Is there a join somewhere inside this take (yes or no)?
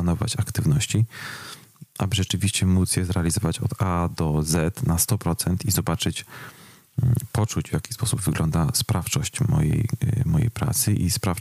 no